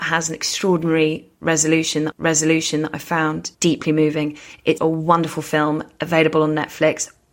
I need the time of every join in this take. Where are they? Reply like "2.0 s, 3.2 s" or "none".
2.1 s, 3.5 s, 4.8 s